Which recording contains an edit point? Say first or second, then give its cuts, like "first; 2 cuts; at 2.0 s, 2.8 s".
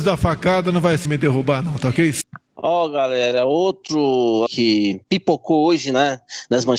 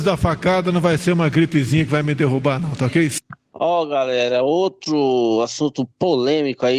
first; 2 cuts; at 1.1 s, 4.5 s